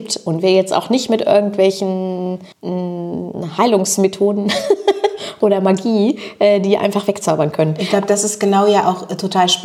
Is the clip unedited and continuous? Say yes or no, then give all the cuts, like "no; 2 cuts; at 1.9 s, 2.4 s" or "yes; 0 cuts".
no; 1 cut; at 2.5 s